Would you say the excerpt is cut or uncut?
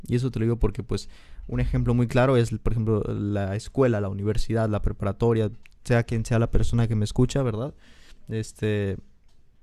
uncut